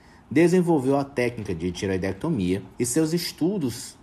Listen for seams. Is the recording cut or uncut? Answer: cut